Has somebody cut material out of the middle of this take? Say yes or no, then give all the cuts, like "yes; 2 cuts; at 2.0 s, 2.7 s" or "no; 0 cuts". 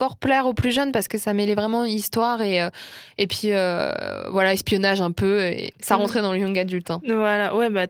no; 0 cuts